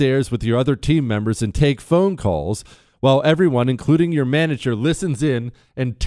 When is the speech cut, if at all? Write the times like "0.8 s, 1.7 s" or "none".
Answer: none